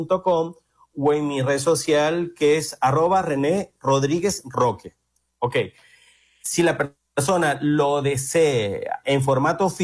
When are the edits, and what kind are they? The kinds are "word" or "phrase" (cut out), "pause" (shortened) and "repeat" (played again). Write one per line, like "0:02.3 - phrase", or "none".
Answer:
none